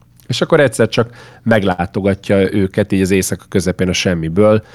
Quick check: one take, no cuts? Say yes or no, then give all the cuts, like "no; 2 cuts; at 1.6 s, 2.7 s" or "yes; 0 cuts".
yes; 0 cuts